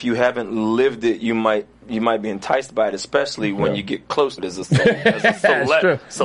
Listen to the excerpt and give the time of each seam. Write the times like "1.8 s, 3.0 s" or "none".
1.8 s, 4.4 s